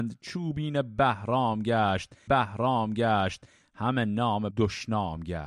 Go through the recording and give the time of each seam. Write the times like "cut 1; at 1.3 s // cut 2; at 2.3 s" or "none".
cut 1; at 2.3 s // cut 2; at 4.5 s